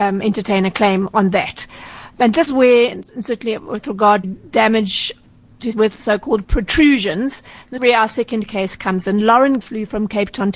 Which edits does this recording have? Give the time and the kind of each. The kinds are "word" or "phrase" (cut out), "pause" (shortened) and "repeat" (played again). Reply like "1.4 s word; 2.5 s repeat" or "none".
2.5 s word; 4.2 s word; 5.7 s word; 6.4 s word; 7.8 s word; 9.6 s word